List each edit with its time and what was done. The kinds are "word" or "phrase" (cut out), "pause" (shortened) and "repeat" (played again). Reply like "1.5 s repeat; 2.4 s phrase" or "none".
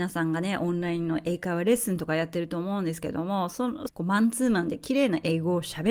3.9 s phrase